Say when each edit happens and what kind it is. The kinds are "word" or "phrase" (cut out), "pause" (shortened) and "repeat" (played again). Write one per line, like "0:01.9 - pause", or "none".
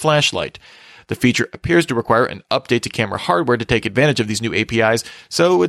none